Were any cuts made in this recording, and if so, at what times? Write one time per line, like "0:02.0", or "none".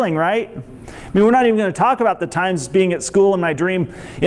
none